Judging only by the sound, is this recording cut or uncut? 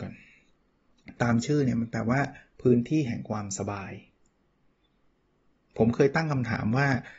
uncut